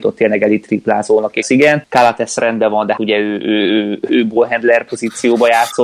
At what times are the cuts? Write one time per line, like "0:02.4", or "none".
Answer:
0:01.4
0:03.0
0:04.1